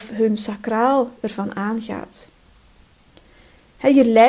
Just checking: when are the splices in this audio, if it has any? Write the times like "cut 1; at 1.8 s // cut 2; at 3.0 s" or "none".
none